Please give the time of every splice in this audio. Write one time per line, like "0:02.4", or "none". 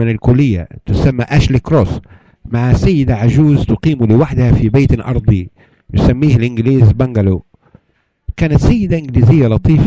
none